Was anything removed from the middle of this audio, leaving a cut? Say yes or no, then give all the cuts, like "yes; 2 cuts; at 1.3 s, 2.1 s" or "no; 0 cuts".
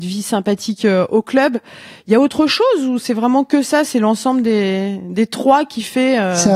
no; 0 cuts